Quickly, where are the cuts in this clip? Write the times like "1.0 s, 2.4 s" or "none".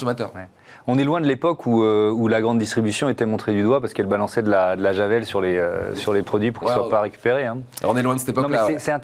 none